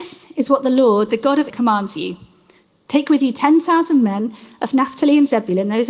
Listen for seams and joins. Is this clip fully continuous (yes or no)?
no